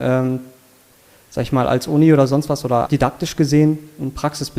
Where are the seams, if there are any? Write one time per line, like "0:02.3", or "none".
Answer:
0:02.9